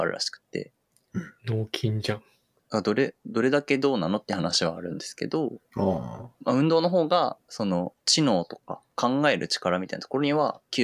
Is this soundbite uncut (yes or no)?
no